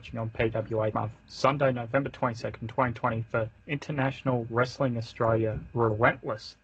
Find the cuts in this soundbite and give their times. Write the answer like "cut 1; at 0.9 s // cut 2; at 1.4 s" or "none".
cut 1; at 0.9 s // cut 2; at 3.6 s